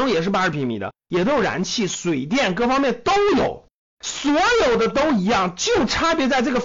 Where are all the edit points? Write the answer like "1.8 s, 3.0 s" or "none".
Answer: none